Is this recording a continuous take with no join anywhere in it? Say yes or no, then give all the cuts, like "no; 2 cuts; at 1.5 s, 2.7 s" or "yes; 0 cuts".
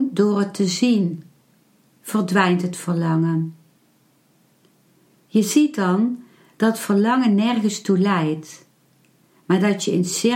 yes; 0 cuts